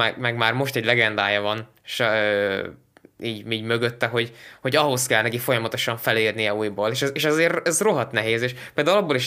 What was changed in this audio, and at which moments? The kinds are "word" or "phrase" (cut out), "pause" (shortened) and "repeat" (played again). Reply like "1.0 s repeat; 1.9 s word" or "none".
none